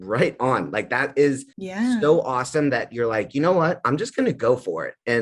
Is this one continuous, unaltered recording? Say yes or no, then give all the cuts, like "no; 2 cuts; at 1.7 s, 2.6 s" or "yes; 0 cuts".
no; 1 cut; at 1.5 s